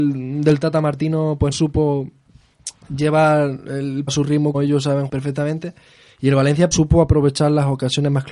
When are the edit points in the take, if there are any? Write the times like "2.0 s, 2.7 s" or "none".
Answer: 1.5 s, 4.1 s, 4.5 s, 5.1 s, 6.7 s

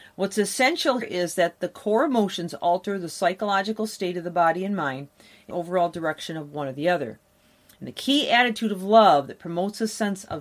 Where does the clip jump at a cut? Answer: 1.0 s, 5.5 s

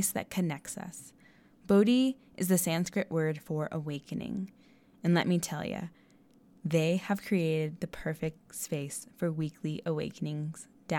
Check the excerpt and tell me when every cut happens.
none

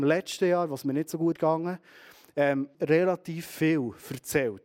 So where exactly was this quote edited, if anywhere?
1.4 s, 2.7 s

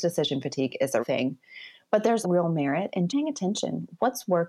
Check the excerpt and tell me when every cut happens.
1.0 s, 2.2 s, 3.1 s

